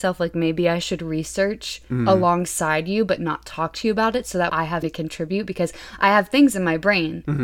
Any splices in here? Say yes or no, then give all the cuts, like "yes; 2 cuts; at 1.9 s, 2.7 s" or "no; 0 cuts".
yes; 2 cuts; at 4.5 s, 4.8 s